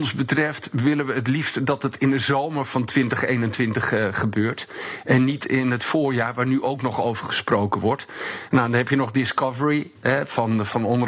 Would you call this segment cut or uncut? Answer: uncut